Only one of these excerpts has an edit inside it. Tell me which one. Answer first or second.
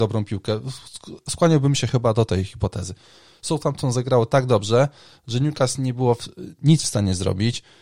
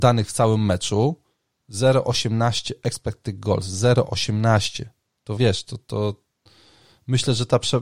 second